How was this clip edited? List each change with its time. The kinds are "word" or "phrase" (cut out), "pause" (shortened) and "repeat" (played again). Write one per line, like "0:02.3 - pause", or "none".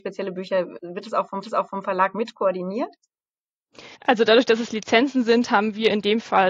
0:01.4 - repeat
0:04.0 - pause